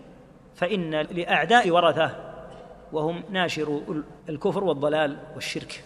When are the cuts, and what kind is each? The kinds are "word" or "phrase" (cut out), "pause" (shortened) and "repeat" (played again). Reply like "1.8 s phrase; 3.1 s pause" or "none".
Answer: 1.6 s word; 4.2 s pause